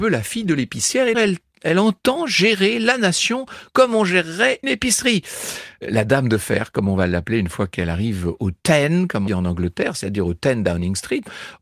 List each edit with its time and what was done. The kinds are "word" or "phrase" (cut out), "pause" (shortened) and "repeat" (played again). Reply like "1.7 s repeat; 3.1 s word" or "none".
1.1 s word; 4.6 s word; 9.3 s word